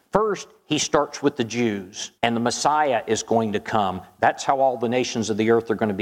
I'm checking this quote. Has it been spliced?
yes; 1 cut; at 2.2 s

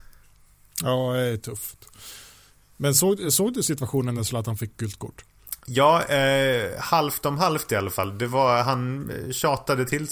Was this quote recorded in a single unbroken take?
yes; 0 cuts

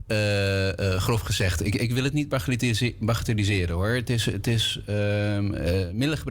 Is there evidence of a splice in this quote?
no; 0 cuts

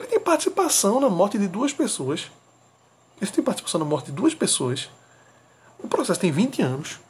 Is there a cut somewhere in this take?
no; 0 cuts

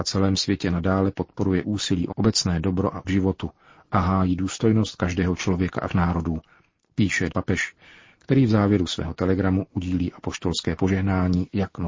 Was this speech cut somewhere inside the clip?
yes; 4 cuts; at 2.1 s, 3.0 s, 5.9 s, 7.3 s

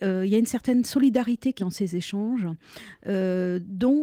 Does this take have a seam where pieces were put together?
yes; 1 cut; at 1.6 s

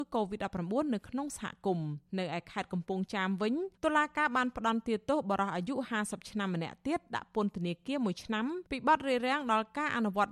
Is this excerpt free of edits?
no; 3 cuts; at 2.1 s, 3.7 s, 8.7 s

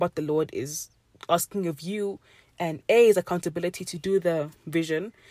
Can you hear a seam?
no; 0 cuts

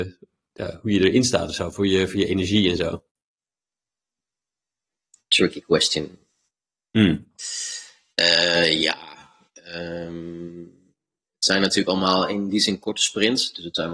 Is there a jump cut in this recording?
no; 0 cuts

